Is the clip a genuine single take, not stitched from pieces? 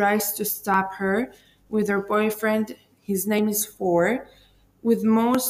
yes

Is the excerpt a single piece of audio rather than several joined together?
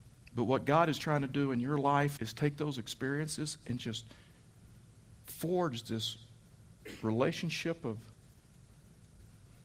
no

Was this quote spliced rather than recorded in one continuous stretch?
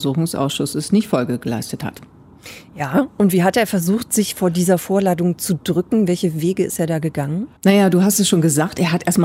yes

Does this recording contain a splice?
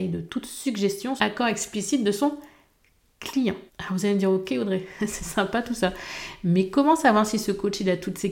yes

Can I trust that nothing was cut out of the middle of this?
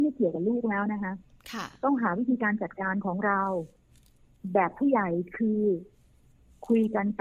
yes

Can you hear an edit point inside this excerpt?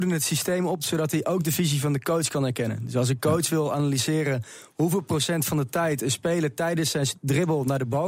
no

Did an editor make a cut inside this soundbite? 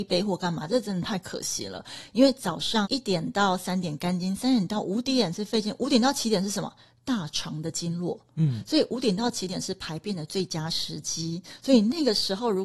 no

